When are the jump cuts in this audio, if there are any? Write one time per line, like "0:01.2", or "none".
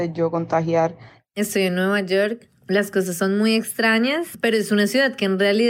none